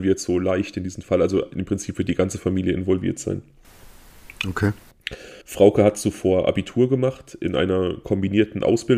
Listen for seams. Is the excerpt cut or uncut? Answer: cut